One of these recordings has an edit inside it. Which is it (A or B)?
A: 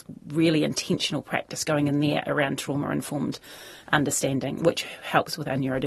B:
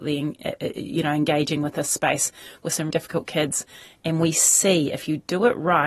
B